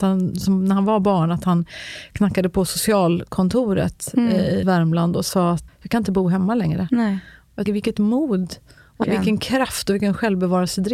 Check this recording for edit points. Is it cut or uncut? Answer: cut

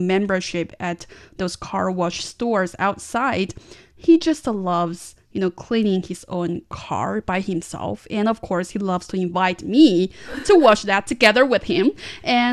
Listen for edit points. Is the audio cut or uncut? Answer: uncut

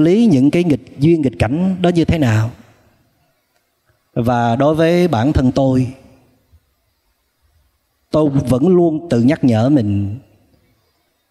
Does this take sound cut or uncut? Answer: uncut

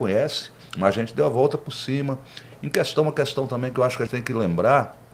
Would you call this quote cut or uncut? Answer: cut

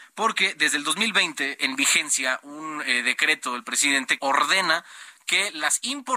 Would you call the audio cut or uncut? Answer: cut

